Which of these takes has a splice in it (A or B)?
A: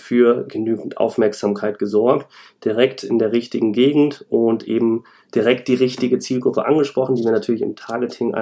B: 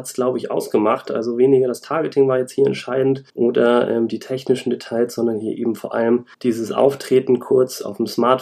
B